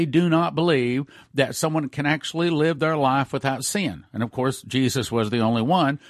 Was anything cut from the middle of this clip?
no; 0 cuts

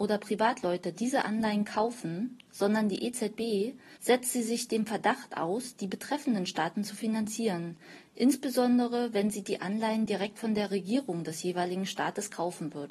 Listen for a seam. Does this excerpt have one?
yes; 1 cut; at 4.0 s

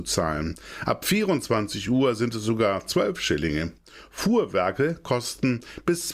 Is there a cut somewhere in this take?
no; 0 cuts

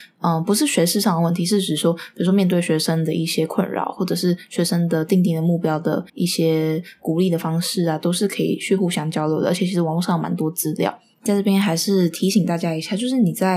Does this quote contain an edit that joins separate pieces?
yes; 2 cuts; at 6.1 s, 11.3 s

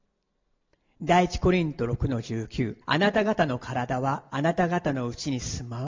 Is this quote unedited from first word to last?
no; 2 cuts; at 2.8 s, 4.3 s

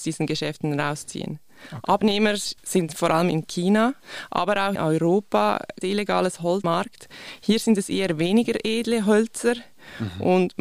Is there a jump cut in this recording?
yes; 4 cuts; at 2.6 s, 4.7 s, 5.8 s, 6.6 s

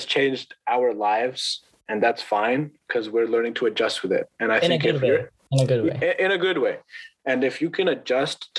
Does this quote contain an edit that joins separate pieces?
no; 0 cuts

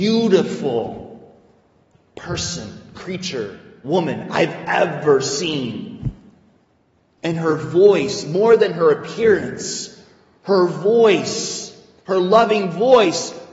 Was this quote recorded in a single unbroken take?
yes; 0 cuts

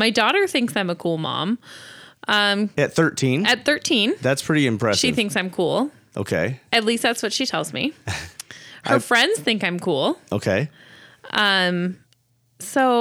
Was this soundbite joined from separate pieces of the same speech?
no; 0 cuts

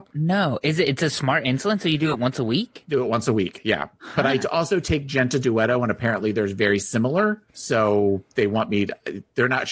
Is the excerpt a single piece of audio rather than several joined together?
no; 1 cut; at 7.5 s

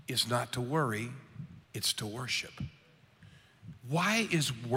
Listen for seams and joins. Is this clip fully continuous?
no; 2 cuts; at 1.6 s, 3.8 s

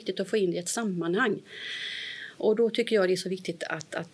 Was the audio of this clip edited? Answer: no; 0 cuts

